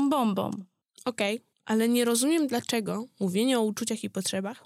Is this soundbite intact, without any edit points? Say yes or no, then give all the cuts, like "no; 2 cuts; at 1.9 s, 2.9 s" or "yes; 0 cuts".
yes; 0 cuts